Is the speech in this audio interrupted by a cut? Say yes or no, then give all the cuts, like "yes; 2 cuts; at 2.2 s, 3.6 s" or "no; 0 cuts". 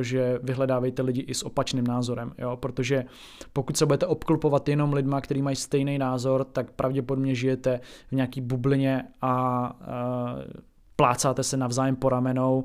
no; 0 cuts